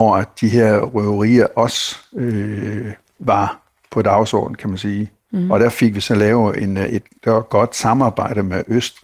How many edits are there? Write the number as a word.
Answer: two